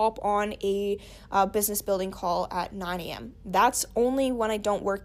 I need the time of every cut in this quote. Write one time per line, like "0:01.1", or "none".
none